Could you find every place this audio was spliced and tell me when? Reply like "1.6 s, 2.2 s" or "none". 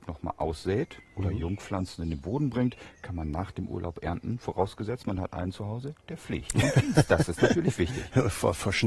none

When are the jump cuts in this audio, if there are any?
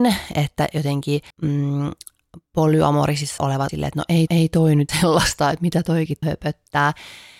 1.3 s, 3.4 s, 3.7 s, 4.3 s, 4.9 s, 6.2 s

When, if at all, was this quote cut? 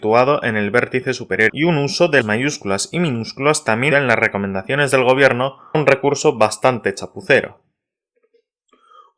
1.5 s, 2.2 s, 3.9 s, 5.7 s

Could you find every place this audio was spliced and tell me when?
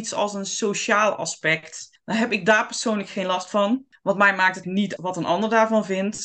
4.6 s, 5.0 s

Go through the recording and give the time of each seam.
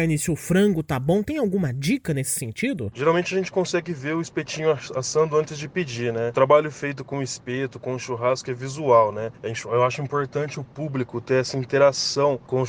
none

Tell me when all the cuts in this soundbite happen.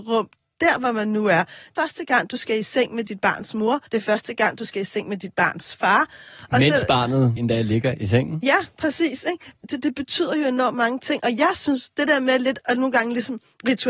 1.8 s, 3.9 s, 7.4 s, 12.6 s

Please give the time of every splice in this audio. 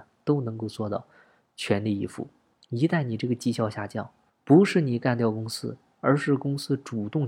2.6 s, 4.3 s

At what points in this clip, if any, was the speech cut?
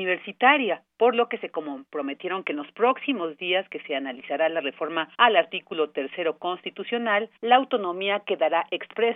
5.1 s, 7.4 s

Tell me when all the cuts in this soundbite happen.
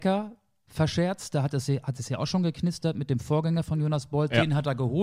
none

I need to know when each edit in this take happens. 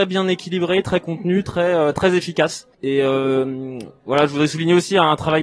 2.7 s

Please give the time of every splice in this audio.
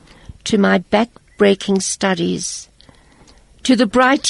none

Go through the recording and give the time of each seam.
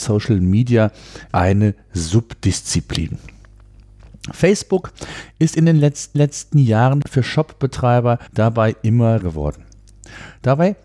1.3 s, 6.1 s, 8.3 s, 9.2 s

